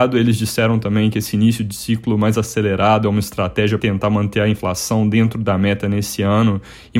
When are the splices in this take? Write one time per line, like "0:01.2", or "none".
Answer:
0:03.8